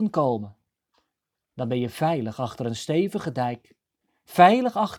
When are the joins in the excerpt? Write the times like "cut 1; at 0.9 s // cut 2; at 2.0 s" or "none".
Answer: none